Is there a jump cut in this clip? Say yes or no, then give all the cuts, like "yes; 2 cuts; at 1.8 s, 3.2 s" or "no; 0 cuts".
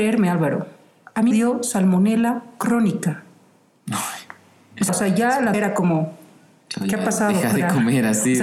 yes; 3 cuts; at 1.3 s, 4.9 s, 5.5 s